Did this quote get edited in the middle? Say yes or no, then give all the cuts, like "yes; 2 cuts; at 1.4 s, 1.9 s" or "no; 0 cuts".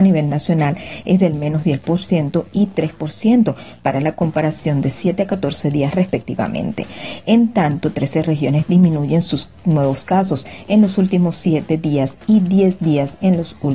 no; 0 cuts